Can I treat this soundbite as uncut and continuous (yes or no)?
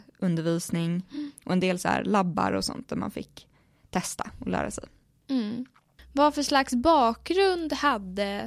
yes